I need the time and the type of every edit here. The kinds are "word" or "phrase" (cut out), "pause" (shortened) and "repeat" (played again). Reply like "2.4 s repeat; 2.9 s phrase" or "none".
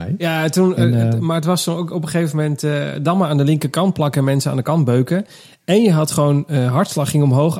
none